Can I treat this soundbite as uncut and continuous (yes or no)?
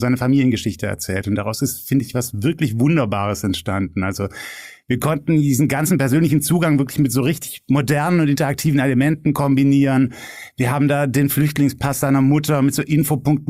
yes